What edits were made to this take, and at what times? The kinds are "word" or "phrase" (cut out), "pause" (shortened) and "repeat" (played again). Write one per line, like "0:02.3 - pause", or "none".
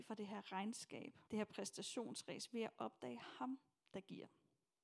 0:01.3 - pause

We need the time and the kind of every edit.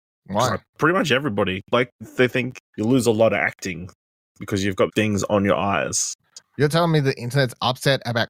0:02.0 - word
0:02.6 - word
0:04.9 - word

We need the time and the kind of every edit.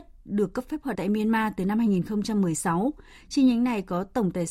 0:00.9 - word

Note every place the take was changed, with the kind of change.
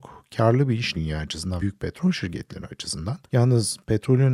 0:00.9 - word
0:01.6 - word
0:03.3 - pause

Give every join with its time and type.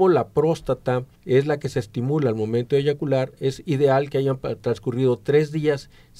0:01.1 - pause

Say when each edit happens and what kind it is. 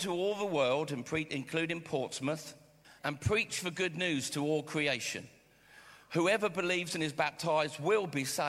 0:02.8 - pause

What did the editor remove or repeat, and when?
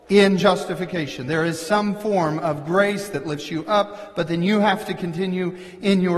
none

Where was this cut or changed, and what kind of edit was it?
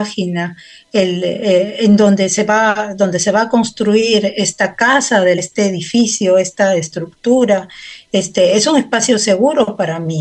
0:05.4 - phrase

